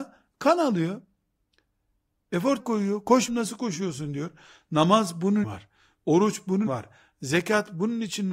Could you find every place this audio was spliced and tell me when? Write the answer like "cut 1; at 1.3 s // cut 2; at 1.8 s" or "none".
cut 1; at 2.6 s // cut 2; at 3.3 s // cut 3; at 5.4 s // cut 4; at 6.7 s